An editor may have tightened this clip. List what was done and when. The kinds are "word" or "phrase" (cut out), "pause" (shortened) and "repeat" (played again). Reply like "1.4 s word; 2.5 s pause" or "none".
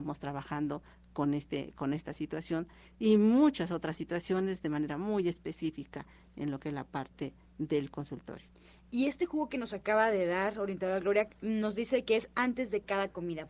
none